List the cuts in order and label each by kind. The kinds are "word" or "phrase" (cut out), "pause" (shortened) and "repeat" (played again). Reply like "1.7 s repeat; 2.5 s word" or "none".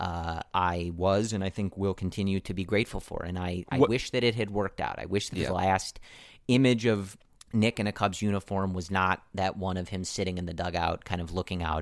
7.4 s pause